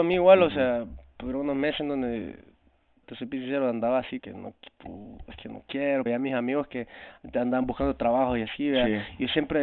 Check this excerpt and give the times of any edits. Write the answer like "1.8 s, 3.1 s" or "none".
3.0 s, 4.2 s, 6.1 s